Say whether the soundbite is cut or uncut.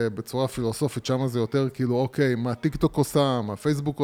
uncut